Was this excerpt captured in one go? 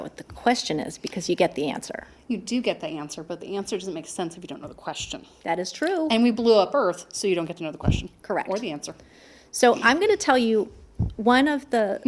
yes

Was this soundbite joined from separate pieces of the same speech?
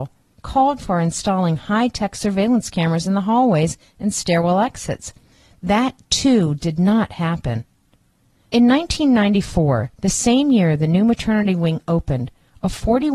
no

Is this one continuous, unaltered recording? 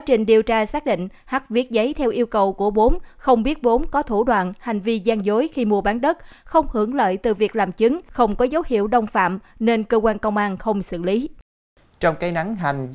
yes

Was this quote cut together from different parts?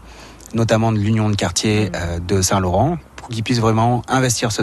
no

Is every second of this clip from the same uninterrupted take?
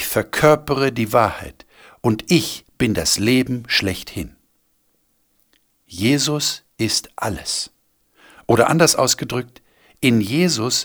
yes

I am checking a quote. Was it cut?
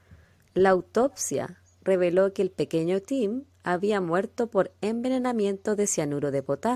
no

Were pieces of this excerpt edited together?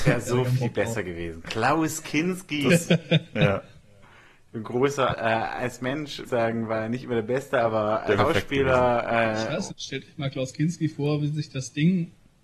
yes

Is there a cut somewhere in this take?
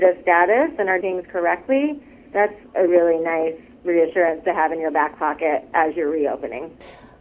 yes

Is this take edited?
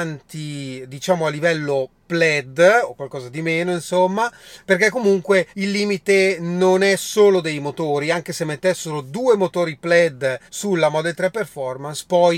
yes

